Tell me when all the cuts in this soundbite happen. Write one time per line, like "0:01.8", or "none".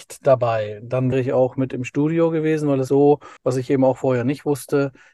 0:01.1
0:02.9
0:03.4